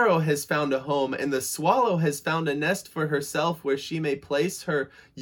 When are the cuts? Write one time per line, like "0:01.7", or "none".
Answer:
none